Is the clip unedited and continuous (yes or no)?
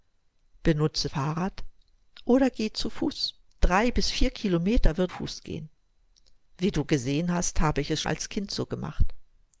no